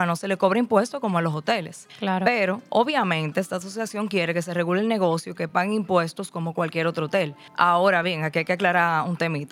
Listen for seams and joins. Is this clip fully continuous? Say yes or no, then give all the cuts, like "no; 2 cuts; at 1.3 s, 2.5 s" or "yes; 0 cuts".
yes; 0 cuts